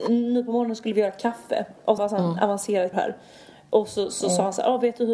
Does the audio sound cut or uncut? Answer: cut